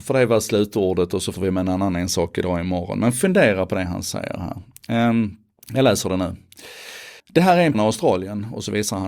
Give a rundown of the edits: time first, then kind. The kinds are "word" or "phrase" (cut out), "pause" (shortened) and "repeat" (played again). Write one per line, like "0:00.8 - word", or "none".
0:01.3 - word
0:05.6 - pause
0:07.2 - pause
0:07.7 - phrase